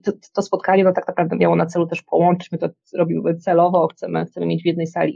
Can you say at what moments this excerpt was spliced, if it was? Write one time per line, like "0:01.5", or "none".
none